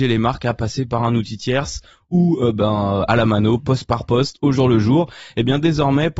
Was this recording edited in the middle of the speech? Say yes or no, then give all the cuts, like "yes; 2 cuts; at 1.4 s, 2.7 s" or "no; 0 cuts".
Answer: no; 0 cuts